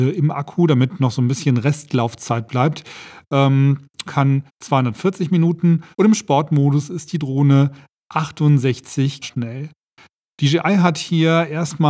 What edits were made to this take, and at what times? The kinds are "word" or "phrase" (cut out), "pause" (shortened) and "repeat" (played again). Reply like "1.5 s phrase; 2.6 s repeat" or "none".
4.1 s phrase; 4.5 s pause; 5.9 s pause; 9.2 s word